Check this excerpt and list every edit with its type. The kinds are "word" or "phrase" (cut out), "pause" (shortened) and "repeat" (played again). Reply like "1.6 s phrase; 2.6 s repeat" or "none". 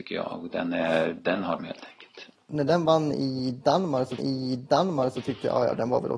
1.6 s word; 4.2 s repeat